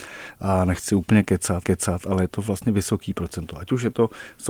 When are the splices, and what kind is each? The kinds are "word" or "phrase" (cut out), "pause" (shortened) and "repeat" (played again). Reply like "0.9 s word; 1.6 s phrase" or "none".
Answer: 1.6 s repeat